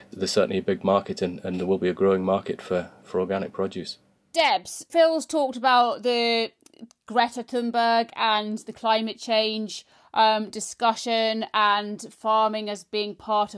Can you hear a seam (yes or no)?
no